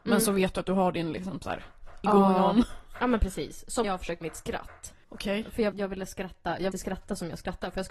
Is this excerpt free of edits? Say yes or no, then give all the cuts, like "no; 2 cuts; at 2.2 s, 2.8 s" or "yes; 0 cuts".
no; 6 cuts; at 2.0 s, 3.8 s, 4.2 s, 5.0 s, 5.7 s, 6.7 s